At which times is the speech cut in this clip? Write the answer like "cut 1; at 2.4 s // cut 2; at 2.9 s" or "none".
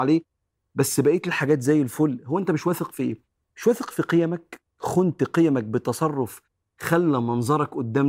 none